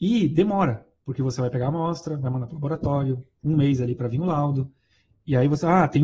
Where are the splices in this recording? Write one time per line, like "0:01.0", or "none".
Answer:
none